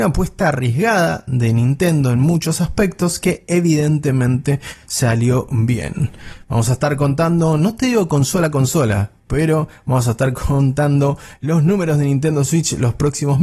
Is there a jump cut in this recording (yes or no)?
no